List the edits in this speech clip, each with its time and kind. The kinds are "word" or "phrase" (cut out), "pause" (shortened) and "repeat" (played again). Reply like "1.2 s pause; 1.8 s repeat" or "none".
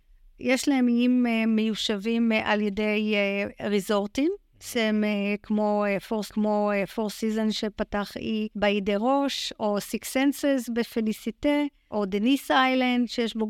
6.3 s repeat; 8.5 s pause; 11.9 s word